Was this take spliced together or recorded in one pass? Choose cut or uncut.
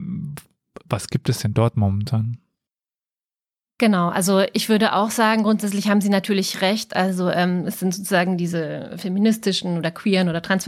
uncut